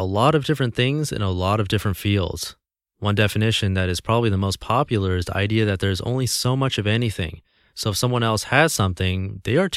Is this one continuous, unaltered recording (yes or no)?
yes